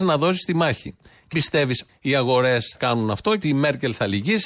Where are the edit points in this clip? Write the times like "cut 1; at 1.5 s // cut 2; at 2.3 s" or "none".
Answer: cut 1; at 1.3 s // cut 2; at 1.9 s // cut 3; at 2.7 s // cut 4; at 3.4 s